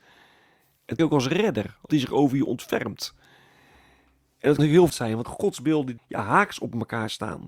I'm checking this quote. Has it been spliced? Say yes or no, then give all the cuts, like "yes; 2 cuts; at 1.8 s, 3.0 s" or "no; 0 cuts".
yes; 6 cuts; at 1.0 s, 1.9 s, 4.6 s, 4.9 s, 5.2 s, 6.0 s